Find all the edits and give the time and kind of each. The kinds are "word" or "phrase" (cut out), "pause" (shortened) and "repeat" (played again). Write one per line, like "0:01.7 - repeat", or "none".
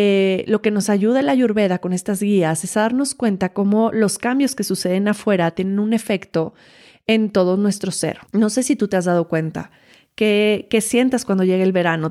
0:08.2 - pause